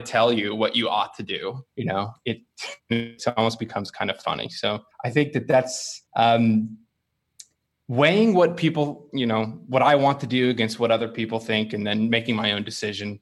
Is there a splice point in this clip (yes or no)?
yes